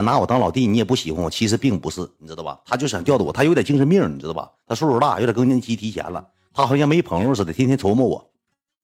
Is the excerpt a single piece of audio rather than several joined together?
yes; 0 cuts

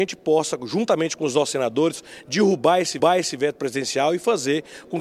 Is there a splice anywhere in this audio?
yes; 1 cut; at 3.0 s

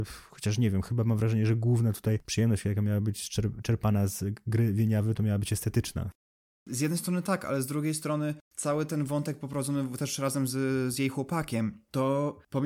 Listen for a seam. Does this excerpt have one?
no; 0 cuts

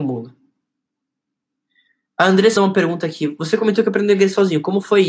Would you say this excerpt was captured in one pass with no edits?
no; 1 cut; at 2.6 s

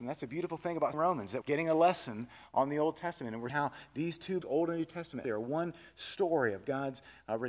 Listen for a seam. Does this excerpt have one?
yes; 5 cuts; at 0.9 s, 1.4 s, 3.5 s, 4.4 s, 5.2 s

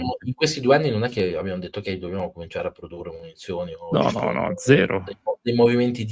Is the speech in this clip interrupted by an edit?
no; 0 cuts

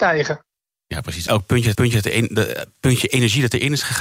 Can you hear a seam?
yes; 2 cuts; at 1.3 s, 1.7 s

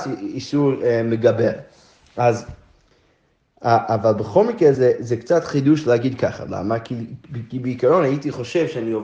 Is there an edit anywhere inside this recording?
no; 0 cuts

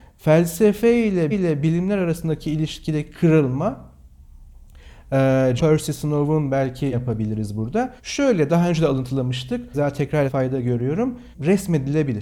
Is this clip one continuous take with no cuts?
no; 7 cuts; at 1.3 s, 5.6 s, 6.9 s, 8.0 s, 9.7 s, 10.3 s, 11.3 s

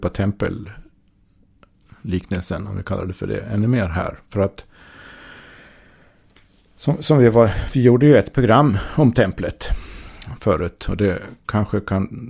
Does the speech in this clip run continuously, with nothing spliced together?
yes; 0 cuts

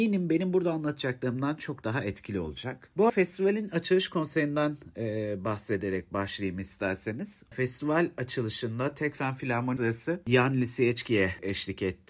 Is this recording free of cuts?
no; 2 cuts; at 3.1 s, 9.8 s

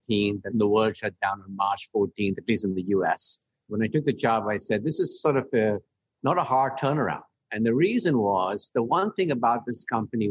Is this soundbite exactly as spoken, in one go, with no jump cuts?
yes; 0 cuts

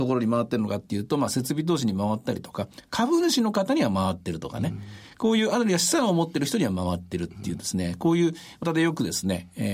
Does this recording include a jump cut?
yes; 1 cut; at 8.6 s

